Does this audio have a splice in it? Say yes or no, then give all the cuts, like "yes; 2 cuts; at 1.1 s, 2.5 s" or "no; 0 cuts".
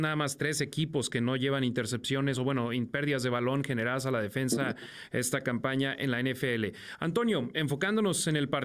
no; 0 cuts